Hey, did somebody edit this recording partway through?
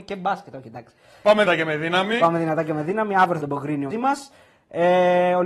yes; 3 cuts; at 1.4 s, 3.4 s, 3.9 s

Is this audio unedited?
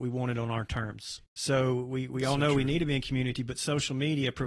no; 1 cut; at 1.3 s

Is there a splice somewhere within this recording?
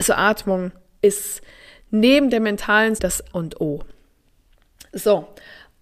yes; 2 cuts; at 3.0 s, 3.3 s

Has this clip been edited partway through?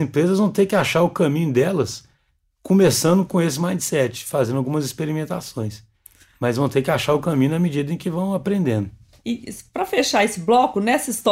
no; 0 cuts

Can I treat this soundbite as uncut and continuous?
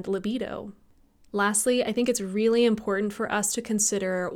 yes; 0 cuts

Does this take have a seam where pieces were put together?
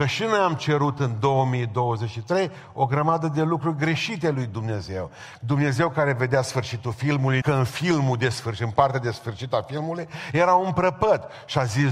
yes; 1 cut; at 7.4 s

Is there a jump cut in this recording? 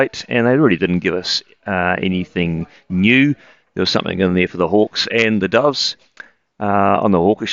no; 0 cuts

